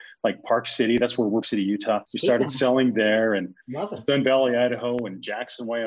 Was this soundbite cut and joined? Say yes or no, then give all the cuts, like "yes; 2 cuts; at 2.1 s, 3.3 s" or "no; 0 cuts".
yes; 2 cuts; at 1.4 s, 2.0 s